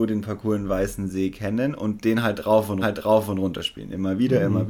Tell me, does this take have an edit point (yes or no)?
yes